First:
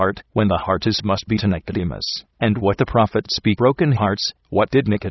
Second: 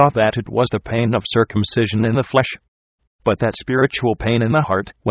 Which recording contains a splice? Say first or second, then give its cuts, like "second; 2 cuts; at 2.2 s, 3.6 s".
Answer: first; 4 cuts; at 1.0 s, 1.4 s, 2.3 s, 3.6 s